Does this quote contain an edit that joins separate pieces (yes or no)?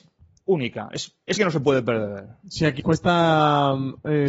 yes